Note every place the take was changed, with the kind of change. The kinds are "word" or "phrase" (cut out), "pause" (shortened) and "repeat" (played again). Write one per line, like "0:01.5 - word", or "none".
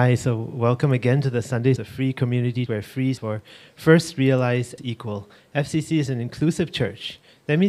0:01.8 - word
0:02.7 - word
0:03.2 - word
0:04.8 - word